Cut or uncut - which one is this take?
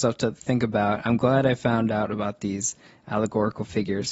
uncut